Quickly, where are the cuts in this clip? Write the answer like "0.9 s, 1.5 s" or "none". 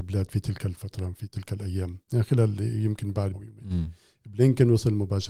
2.0 s, 3.3 s